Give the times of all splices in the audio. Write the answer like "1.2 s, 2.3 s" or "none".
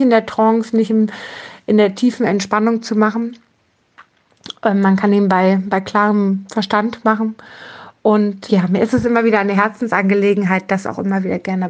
8.5 s